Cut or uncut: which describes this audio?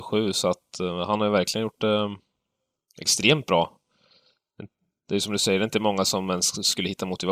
uncut